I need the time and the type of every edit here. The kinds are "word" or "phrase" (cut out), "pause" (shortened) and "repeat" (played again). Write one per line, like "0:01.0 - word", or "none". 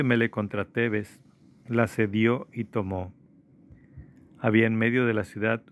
none